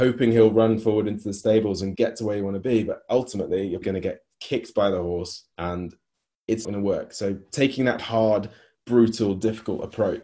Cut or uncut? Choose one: cut